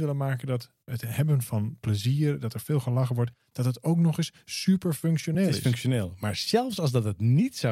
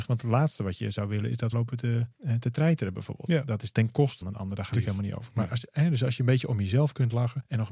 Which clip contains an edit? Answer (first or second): second